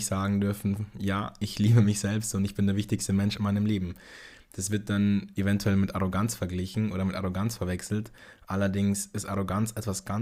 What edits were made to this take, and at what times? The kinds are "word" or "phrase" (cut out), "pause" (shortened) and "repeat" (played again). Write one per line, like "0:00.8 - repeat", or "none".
none